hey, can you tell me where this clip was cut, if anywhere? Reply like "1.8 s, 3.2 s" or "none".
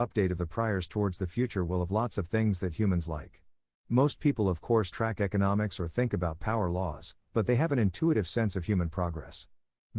4.9 s